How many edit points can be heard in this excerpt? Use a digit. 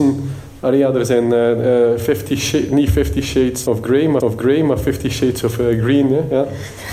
1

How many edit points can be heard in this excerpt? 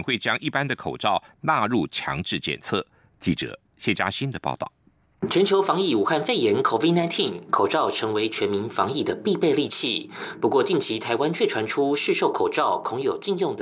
0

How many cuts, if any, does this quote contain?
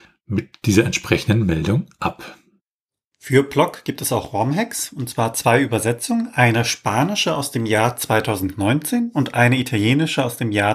0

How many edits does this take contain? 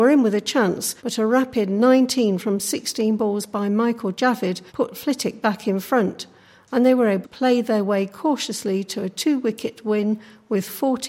3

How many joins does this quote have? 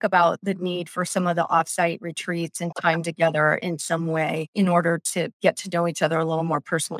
1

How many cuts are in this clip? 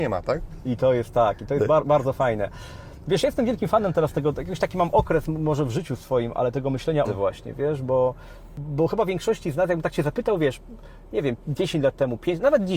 1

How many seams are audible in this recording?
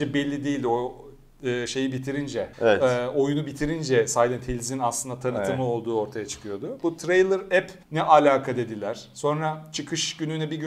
2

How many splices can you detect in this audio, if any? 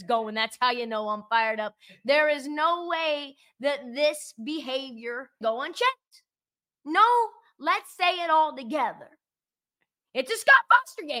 1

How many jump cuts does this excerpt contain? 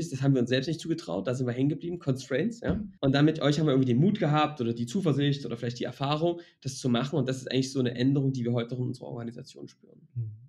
1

